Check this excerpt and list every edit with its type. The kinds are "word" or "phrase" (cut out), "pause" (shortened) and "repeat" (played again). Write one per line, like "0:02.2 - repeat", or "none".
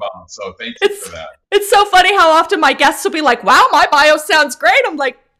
none

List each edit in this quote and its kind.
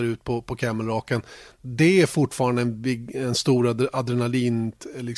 none

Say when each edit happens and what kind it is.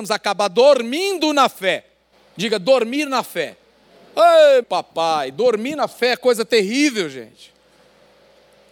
0:02.1 - pause
0:04.6 - word

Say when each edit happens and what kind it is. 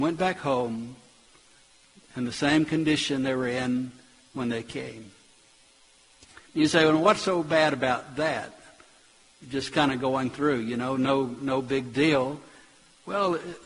none

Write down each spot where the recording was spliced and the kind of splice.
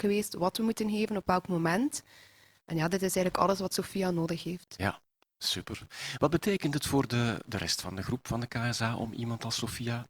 none

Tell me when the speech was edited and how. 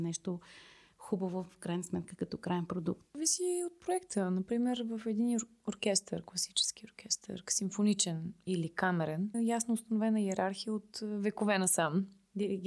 0:09.3 - word

